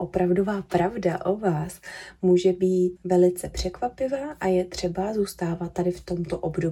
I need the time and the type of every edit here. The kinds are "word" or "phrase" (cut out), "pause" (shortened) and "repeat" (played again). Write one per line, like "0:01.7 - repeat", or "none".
0:03.0 - word